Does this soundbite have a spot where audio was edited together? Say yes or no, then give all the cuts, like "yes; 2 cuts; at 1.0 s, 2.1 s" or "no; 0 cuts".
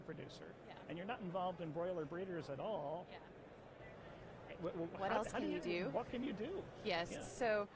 no; 0 cuts